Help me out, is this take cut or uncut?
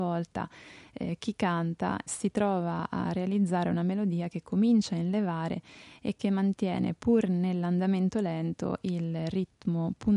uncut